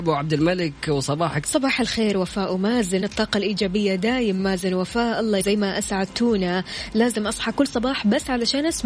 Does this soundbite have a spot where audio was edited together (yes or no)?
yes